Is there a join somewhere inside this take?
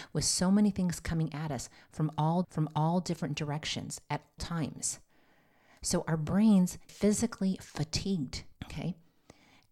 yes; 4 cuts; at 2.4 s, 4.4 s, 6.9 s, 8.6 s

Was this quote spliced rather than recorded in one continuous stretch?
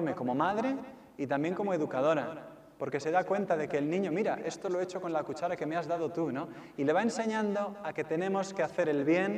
no; 0 cuts

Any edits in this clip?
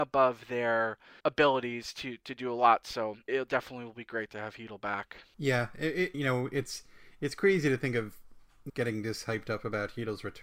yes; 4 cuts; at 1.2 s, 3.3 s, 6.1 s, 8.7 s

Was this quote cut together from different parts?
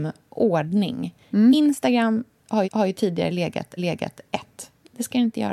yes; 2 cuts; at 2.6 s, 3.8 s

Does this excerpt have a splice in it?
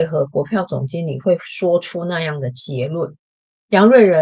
yes; 1 cut; at 3.3 s

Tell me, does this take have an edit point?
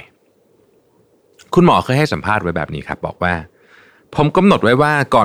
no; 0 cuts

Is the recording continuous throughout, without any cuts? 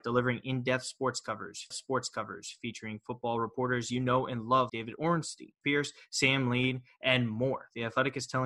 no; 3 cuts; at 1.7 s, 4.7 s, 5.6 s

